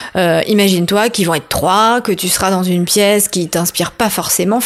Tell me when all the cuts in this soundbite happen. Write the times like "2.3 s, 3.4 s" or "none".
none

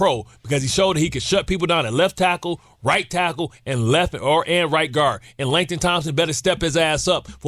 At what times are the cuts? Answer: none

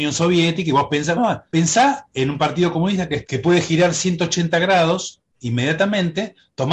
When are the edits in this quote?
1.2 s, 1.5 s, 3.2 s

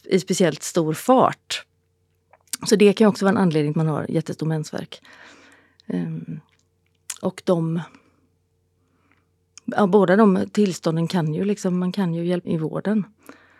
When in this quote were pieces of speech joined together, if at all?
3.7 s, 12.4 s

